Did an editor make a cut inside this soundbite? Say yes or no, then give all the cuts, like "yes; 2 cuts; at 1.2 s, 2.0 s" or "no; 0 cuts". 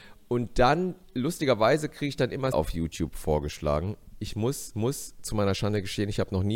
yes; 3 cuts; at 1.0 s, 2.5 s, 4.7 s